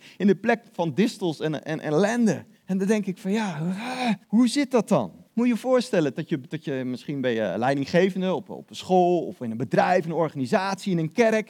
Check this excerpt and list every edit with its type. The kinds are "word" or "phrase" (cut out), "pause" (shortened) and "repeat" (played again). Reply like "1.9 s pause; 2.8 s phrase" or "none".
2.6 s pause; 4.2 s pause; 5.3 s pause

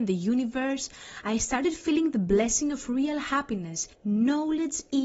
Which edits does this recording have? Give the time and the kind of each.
3.9 s pause

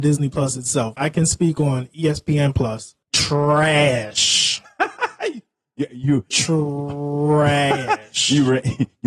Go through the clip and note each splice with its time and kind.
1.0 s word; 3.0 s pause; 6.3 s word

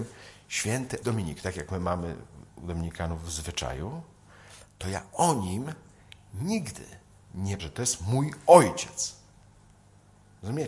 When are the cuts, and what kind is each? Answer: 1.0 s word; 7.6 s word

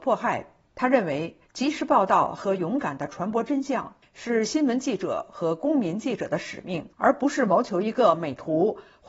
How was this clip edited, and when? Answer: 6.9 s pause

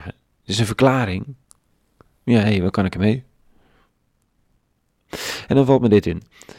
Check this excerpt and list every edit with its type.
none

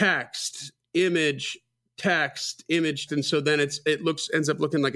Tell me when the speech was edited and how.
3.1 s word

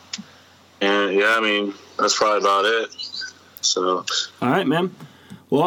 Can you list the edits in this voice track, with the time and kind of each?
none

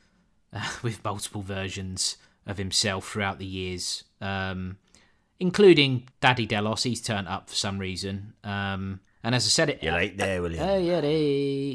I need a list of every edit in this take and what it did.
2.2 s pause; 6.1 s pause; 9.1 s pause

